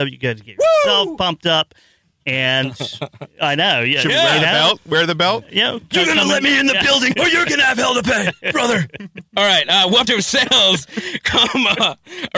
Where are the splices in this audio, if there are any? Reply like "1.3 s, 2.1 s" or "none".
7.1 s, 10.1 s